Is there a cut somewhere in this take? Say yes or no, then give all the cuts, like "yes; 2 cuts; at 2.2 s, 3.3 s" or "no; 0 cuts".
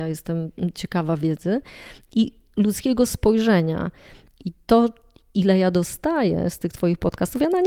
no; 0 cuts